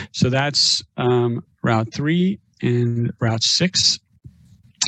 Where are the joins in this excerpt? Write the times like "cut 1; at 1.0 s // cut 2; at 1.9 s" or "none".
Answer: none